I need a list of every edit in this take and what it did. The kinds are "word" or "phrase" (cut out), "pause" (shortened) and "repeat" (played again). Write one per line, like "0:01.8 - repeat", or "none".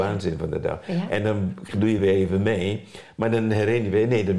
none

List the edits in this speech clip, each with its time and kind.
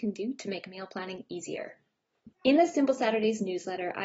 0:02.3 - pause

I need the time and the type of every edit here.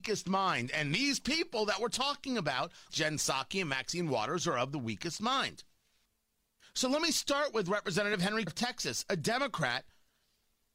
0:02.9 - word
0:06.1 - pause
0:08.5 - word

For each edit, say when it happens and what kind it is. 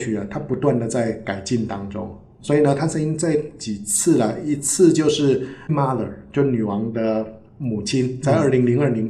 0:05.7 - word

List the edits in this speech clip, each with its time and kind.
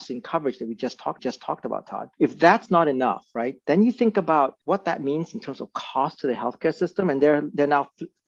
0:01.2 - repeat
0:02.1 - pause
0:04.6 - pause

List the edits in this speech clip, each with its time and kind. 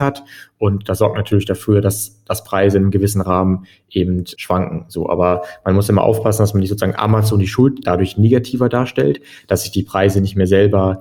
0:04.4 - word
0:07.8 - phrase

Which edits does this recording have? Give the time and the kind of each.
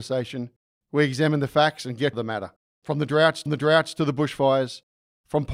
0:02.1 - phrase
0:02.7 - pause
0:03.5 - repeat

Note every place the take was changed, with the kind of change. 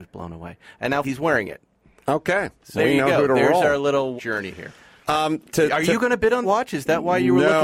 0:01.0 - word
0:02.8 - word
0:04.2 - word
0:06.4 - word

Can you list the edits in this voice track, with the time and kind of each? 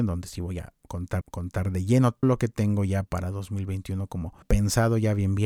0:01.2 - repeat
0:02.2 - word
0:03.0 - word
0:04.4 - word

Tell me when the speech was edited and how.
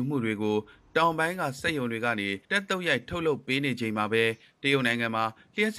0:02.4 - pause

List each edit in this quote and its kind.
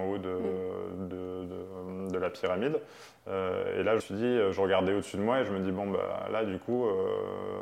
0:04.0 - word

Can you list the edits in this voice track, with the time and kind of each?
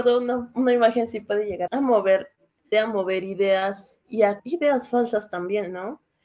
0:01.7 - word
0:02.7 - word
0:04.4 - word

